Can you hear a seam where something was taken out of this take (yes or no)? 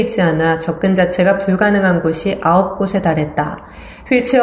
no